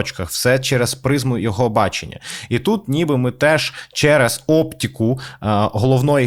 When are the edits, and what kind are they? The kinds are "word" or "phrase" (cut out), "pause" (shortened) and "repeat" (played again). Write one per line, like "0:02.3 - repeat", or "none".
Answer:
none